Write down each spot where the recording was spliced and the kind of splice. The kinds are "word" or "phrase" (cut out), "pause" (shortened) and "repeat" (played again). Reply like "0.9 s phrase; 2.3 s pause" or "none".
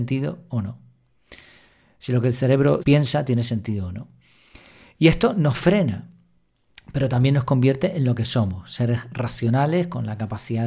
2.8 s word

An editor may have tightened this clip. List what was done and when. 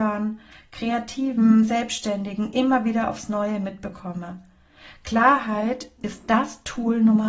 none

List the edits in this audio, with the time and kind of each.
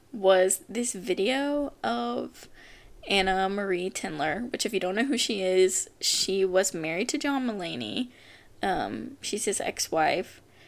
none

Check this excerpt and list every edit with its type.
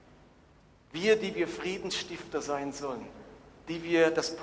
none

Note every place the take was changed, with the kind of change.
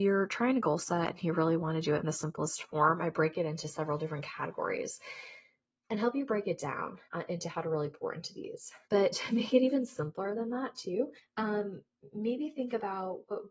7.0 s pause; 8.8 s pause; 11.2 s pause

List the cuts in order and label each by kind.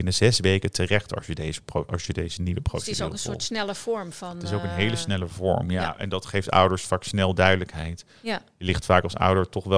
none

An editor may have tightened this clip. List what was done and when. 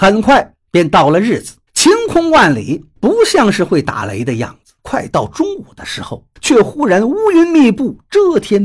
1.7 s pause; 3.0 s pause; 4.8 s pause; 6.4 s pause

